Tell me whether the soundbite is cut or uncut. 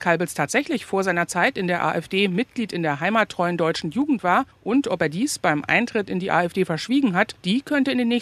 uncut